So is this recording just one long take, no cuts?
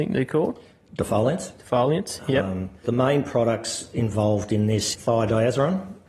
no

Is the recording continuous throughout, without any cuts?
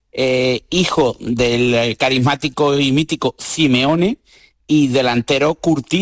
yes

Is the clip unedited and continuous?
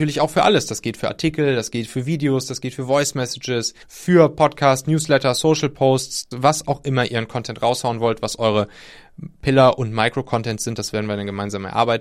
no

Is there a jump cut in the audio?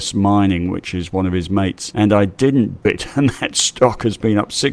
yes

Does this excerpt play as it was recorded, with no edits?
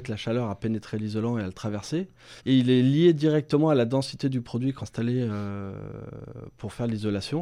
no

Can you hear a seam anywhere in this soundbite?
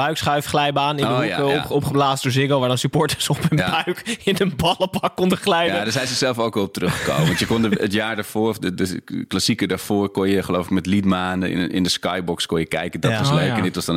no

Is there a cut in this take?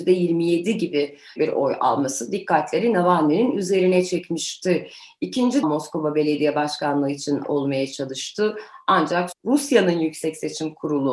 yes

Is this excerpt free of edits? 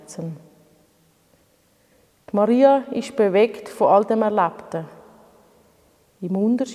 yes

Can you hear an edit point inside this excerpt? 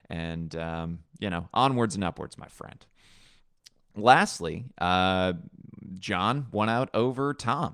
no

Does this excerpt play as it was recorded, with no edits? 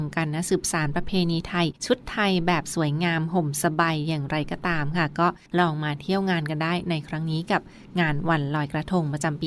no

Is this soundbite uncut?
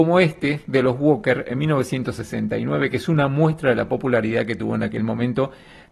yes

